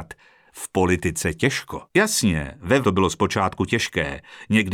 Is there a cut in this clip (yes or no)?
yes